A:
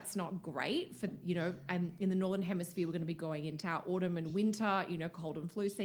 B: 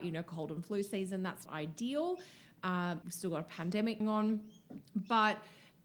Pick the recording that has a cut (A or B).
B